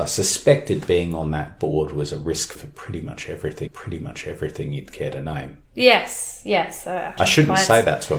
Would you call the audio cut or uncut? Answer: cut